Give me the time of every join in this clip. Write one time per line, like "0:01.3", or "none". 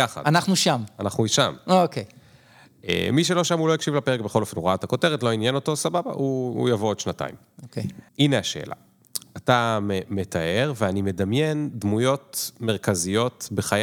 0:08.1